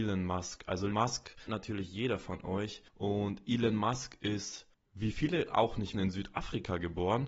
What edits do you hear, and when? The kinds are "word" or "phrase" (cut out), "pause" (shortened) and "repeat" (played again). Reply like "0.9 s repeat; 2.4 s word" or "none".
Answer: 0.9 s word; 1.5 s word; 2.9 s pause; 4.7 s pause; 5.9 s word